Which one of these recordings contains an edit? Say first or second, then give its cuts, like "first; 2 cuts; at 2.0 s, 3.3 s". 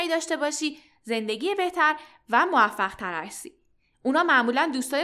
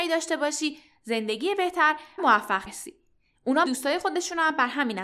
second; 3 cuts; at 2.2 s, 2.7 s, 3.6 s